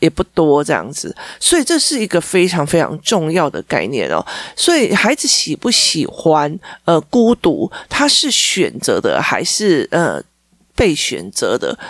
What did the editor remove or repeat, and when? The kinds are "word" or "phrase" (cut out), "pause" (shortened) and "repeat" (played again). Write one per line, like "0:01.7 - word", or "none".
none